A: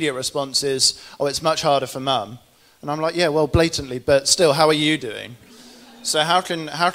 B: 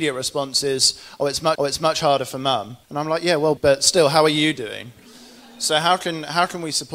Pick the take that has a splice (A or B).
B